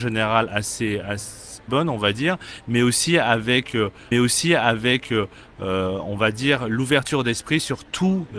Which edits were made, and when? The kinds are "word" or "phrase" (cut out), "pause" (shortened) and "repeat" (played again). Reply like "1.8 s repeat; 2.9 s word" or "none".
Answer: 1.7 s word; 4.1 s repeat